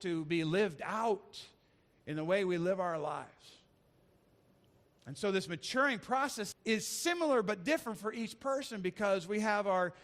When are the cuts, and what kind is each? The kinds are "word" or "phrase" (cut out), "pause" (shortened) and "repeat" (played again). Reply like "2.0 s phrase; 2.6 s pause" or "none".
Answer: 6.5 s word